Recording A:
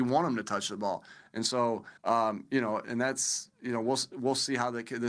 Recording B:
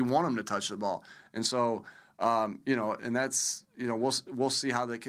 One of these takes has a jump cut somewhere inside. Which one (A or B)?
A